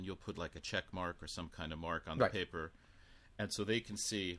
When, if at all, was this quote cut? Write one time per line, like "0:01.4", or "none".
none